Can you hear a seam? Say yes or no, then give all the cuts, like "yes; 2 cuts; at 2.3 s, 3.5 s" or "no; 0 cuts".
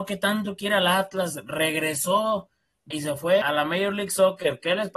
yes; 2 cuts; at 2.9 s, 3.4 s